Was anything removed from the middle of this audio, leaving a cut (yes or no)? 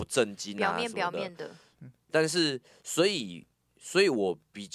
yes